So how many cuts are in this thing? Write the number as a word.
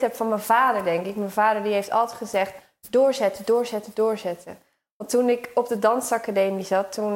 zero